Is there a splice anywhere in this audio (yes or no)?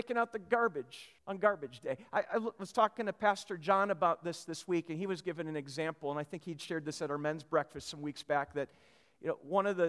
yes